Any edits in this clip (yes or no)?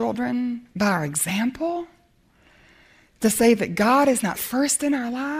no